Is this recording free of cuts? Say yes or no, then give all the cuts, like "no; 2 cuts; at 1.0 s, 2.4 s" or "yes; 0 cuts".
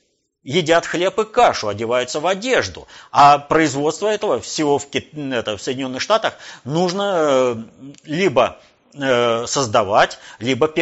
yes; 0 cuts